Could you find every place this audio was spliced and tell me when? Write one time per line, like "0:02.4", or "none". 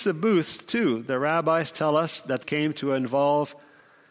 0:02.4